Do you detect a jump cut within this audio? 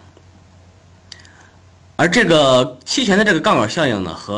no; 0 cuts

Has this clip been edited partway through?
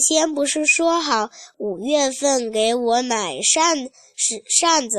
no; 0 cuts

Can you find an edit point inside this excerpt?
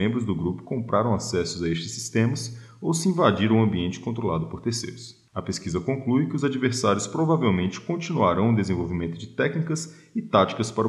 yes; 1 cut; at 5.3 s

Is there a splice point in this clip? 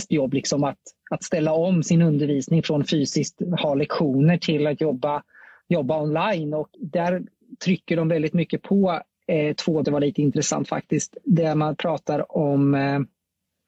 yes; 2 cuts; at 6.7 s, 9.8 s

